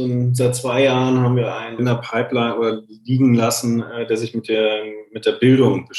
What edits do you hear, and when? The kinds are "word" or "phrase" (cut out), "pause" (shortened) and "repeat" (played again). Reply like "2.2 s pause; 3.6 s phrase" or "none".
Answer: 1.8 s word